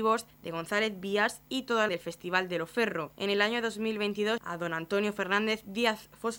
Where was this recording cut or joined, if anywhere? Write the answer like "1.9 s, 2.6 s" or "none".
1.9 s, 4.4 s